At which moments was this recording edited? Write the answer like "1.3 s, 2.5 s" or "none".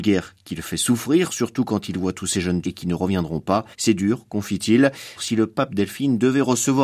2.6 s, 3.7 s, 5.2 s